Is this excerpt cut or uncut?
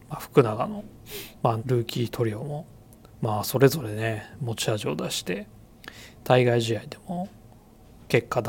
cut